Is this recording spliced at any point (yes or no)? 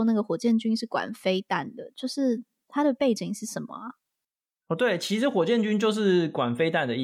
no